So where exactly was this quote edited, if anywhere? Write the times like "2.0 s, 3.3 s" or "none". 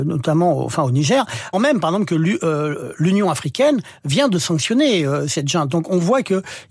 1.5 s